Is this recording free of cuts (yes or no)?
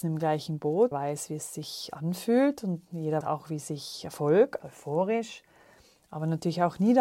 no